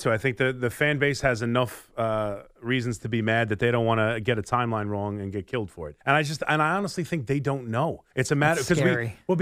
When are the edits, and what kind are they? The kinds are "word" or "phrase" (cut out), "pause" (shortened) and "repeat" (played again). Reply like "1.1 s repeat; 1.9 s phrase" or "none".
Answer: 6.0 s pause; 8.1 s pause